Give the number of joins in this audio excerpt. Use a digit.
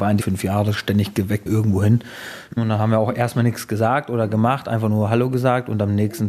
1